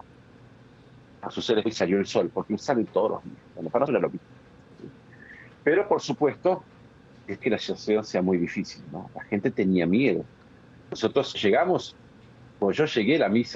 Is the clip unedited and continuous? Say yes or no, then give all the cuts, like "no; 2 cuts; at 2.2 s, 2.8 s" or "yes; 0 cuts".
no; 5 cuts; at 1.7 s, 2.6 s, 3.9 s, 7.4 s, 11.3 s